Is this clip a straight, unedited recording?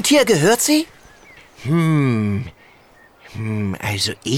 yes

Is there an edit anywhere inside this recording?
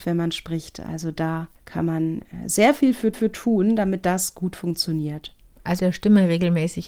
yes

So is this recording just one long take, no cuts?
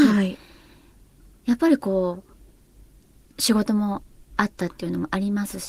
yes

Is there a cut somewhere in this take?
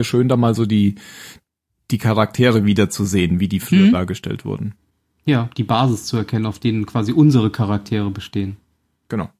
no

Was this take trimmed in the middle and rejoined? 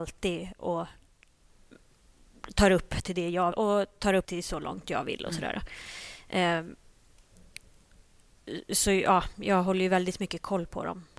yes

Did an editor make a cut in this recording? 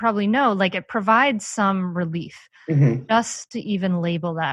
no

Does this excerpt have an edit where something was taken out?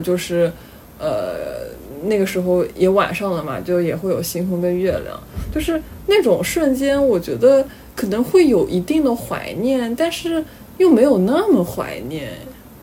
no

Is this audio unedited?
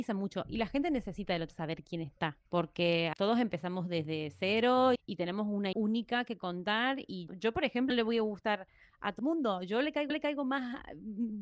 no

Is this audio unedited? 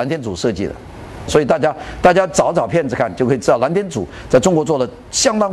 no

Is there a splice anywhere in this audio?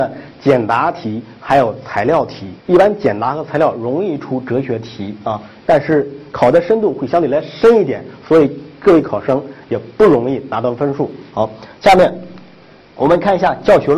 yes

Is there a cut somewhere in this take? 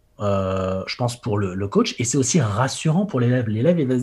no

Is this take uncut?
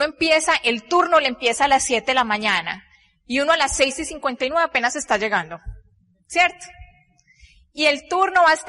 yes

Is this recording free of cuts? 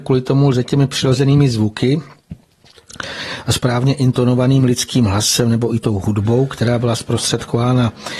yes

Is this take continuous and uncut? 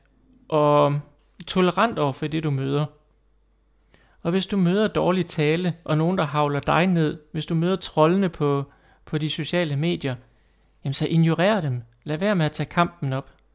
yes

